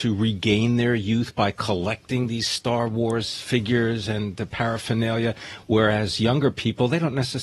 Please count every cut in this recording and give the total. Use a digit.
0